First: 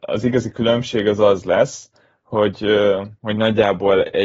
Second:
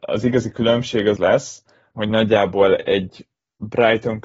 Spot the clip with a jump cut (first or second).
second